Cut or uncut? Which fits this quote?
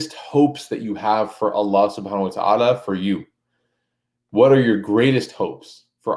uncut